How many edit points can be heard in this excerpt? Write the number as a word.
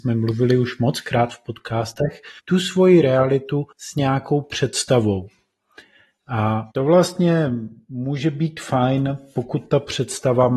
three